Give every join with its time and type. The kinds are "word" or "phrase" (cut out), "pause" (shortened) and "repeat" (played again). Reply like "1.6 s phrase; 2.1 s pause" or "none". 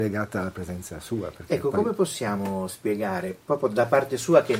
none